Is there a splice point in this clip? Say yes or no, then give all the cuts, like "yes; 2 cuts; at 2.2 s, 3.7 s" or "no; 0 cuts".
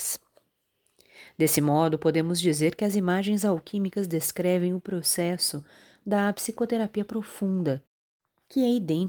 no; 0 cuts